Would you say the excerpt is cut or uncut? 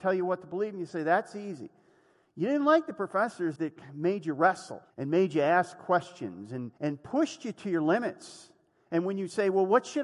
cut